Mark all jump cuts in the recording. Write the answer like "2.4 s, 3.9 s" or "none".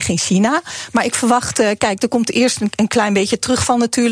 none

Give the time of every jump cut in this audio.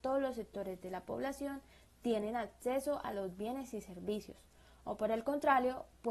none

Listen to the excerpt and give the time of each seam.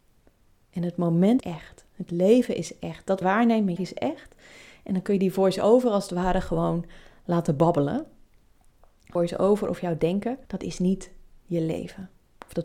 1.4 s, 1.9 s, 3.2 s, 3.8 s, 9.2 s, 10.4 s

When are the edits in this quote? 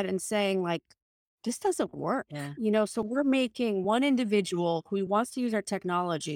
none

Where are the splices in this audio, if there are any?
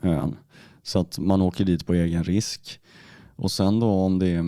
none

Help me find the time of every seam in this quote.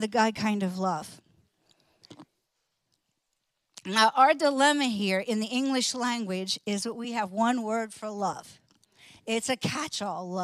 none

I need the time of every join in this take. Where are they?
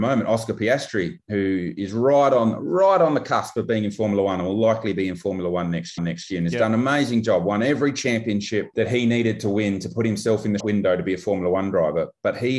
6.0 s, 10.6 s

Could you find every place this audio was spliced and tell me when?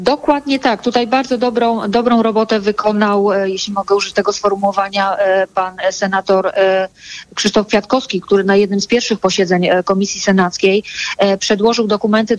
none

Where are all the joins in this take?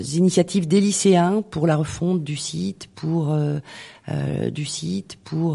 4.5 s

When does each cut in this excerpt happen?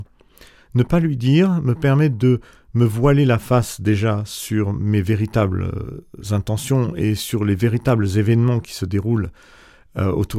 none

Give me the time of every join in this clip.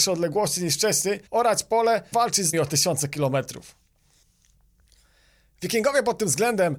1.3 s, 2.1 s, 2.5 s

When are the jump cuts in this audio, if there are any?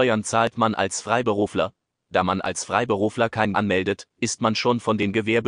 3.5 s

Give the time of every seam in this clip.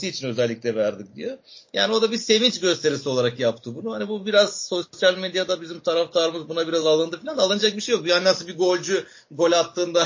none

